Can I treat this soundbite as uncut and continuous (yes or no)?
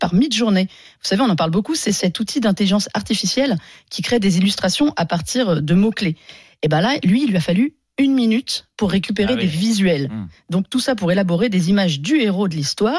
yes